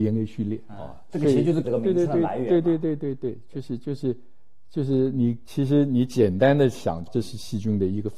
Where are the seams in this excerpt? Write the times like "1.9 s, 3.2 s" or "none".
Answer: 1.6 s